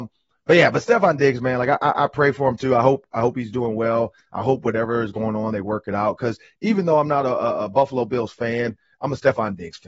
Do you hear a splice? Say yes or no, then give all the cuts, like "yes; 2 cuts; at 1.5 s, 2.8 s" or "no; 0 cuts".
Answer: no; 0 cuts